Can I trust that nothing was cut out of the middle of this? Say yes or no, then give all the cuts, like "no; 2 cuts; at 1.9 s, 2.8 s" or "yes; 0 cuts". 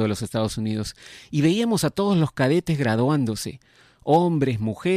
yes; 0 cuts